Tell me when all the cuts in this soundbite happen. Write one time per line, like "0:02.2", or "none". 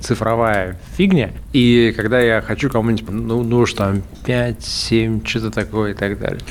0:03.1
0:03.7